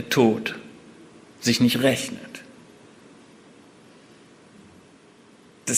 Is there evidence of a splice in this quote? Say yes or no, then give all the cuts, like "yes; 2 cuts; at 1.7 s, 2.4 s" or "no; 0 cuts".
no; 0 cuts